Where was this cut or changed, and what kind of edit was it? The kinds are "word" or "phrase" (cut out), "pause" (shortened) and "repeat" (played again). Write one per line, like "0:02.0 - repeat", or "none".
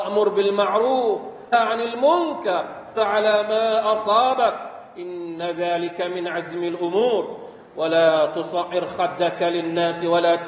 0:01.5 - word
0:03.0 - word